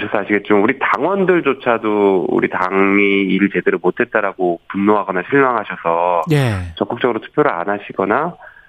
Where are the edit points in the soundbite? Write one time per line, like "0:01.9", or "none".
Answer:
none

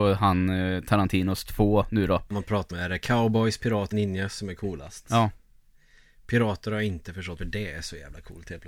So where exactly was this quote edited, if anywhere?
0:02.3
0:02.7
0:03.9
0:07.4

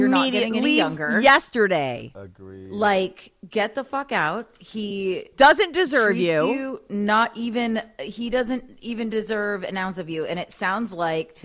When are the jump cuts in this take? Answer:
none

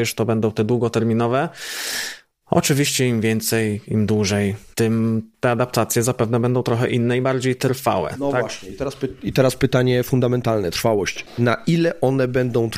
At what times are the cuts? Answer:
none

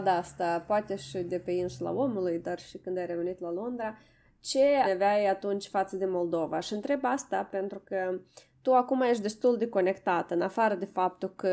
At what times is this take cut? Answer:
0:04.8

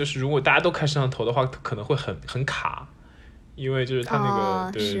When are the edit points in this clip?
none

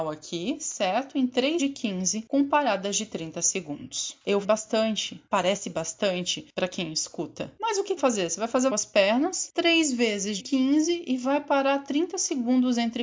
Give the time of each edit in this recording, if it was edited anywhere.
0:01.6
0:04.4
0:08.0
0:08.7
0:10.4

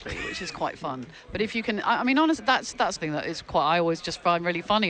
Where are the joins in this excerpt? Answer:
0:03.0

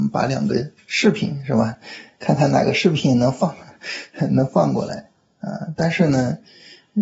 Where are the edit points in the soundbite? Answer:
none

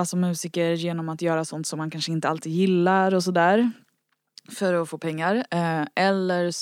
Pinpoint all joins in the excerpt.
none

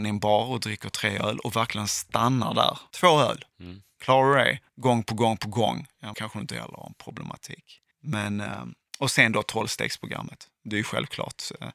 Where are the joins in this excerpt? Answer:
0:00.9
0:02.9
0:03.5
0:04.7
0:06.1
0:07.9

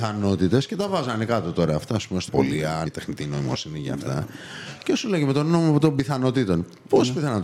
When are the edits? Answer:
0:02.3
0:02.9

